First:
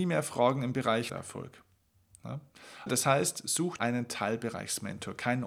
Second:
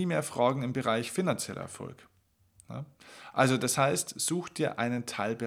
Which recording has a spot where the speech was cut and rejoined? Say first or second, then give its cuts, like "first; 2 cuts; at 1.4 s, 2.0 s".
first; 3 cuts; at 1.1 s, 2.9 s, 3.8 s